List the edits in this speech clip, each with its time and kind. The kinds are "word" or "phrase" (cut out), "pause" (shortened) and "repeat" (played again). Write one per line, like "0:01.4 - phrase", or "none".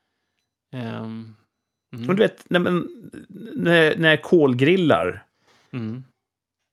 none